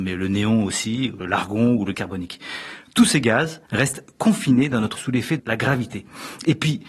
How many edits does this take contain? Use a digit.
5